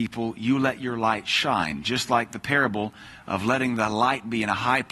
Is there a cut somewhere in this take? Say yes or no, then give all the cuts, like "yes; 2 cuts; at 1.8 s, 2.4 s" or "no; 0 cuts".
no; 0 cuts